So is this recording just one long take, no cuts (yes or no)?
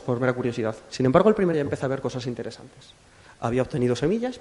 no